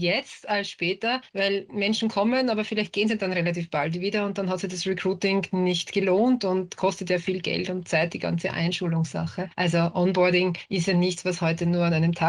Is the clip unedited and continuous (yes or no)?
yes